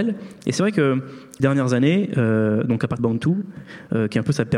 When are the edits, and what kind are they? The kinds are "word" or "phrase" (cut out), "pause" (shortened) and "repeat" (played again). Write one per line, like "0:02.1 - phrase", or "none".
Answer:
0:01.4 - word
0:03.0 - word